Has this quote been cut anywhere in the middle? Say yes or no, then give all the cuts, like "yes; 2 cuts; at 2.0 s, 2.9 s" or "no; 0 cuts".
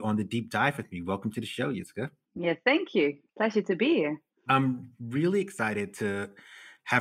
no; 0 cuts